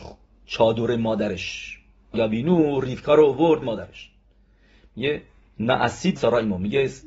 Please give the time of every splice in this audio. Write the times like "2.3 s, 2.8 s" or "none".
2.1 s, 3.6 s, 6.2 s